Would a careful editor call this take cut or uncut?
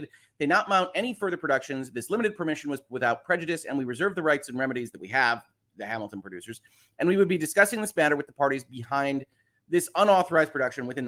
uncut